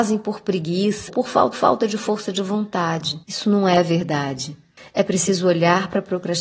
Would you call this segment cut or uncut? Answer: cut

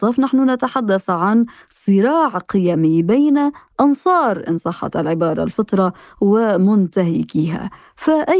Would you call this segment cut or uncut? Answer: uncut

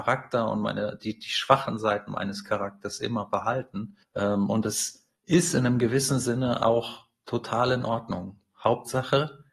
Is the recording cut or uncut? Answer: cut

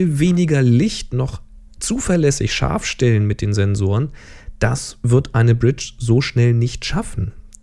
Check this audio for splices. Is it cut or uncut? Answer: uncut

